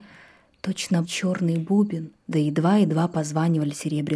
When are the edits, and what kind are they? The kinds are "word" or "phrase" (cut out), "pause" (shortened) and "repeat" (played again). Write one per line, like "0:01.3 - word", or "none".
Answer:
0:01.0 - word
0:02.2 - pause

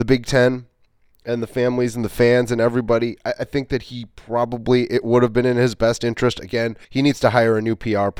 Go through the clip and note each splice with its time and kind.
0:06.8 - pause

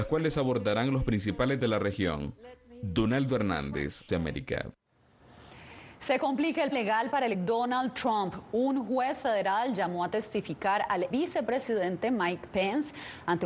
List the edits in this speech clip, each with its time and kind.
0:01.6 - word
0:04.1 - word
0:06.7 - word
0:07.3 - word
0:11.1 - word

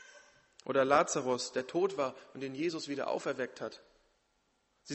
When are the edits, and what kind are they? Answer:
none

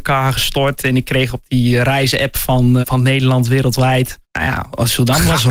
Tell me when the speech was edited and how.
0:02.8 - word
0:04.2 - pause

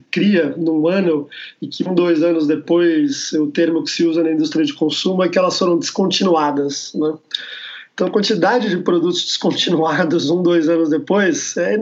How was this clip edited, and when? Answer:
none

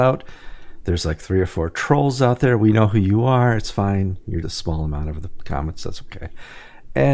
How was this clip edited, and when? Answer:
0:04.4 - word

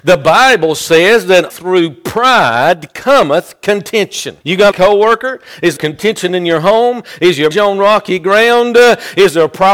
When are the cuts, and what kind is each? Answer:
0:01.5 - word
0:04.4 - pause
0:04.7 - phrase
0:05.8 - word
0:07.5 - word

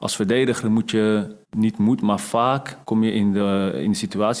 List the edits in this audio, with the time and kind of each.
0:01.4 - pause
0:02.8 - pause

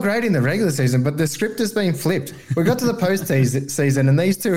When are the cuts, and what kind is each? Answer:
none

